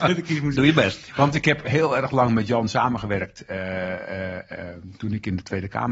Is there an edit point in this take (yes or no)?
no